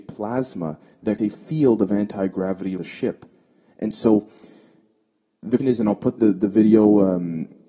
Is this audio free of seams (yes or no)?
no